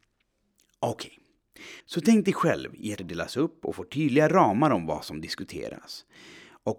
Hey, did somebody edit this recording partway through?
yes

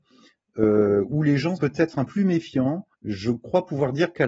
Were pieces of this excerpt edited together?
yes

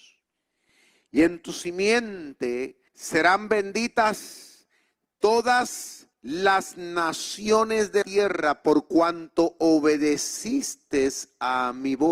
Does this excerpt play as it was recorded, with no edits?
no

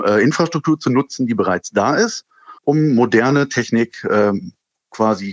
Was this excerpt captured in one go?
no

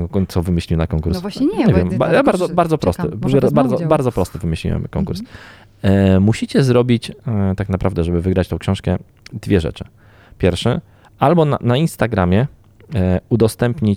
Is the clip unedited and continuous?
yes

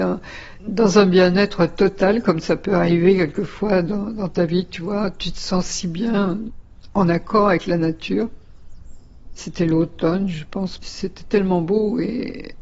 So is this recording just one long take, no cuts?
yes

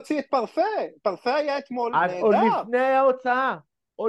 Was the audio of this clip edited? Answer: no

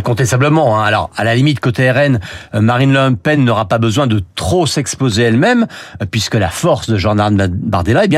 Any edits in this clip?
no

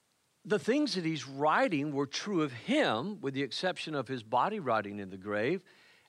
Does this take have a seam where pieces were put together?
no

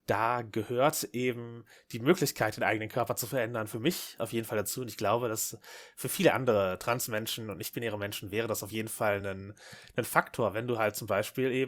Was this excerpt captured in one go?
yes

